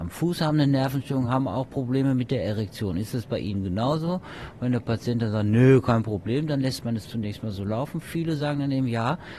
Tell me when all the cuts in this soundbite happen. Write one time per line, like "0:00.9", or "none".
none